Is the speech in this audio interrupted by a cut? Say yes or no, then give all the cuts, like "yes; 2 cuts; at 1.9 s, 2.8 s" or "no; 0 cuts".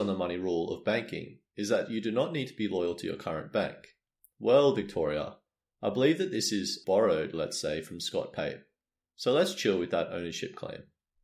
yes; 1 cut; at 6.8 s